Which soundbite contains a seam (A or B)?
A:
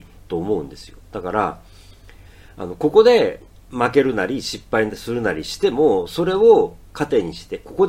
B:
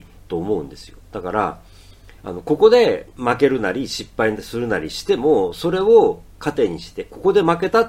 B